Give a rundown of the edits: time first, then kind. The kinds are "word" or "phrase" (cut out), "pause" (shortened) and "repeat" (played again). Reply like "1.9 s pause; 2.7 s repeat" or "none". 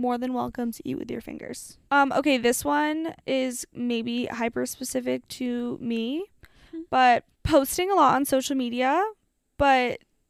1.9 s pause; 3.2 s pause; 7.3 s pause